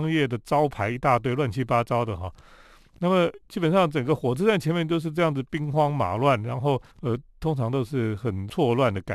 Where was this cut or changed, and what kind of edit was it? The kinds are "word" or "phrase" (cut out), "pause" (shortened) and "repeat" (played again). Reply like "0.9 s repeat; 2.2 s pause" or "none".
6.9 s pause